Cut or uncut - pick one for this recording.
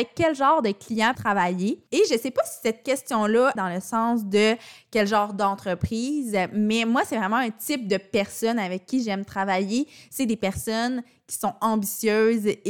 cut